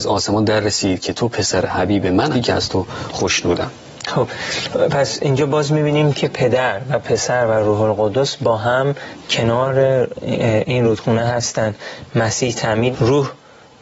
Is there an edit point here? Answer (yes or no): yes